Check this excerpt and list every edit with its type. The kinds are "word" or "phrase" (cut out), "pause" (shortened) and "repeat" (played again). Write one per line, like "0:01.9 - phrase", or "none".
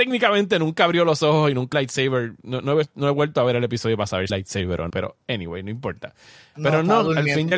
0:01.7 - phrase
0:04.3 - phrase
0:04.9 - word